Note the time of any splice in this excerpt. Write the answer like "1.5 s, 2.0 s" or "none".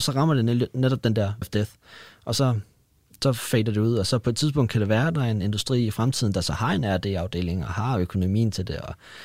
1.4 s